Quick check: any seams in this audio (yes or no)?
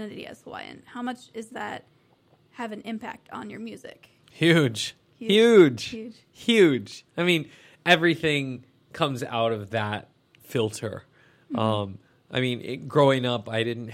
no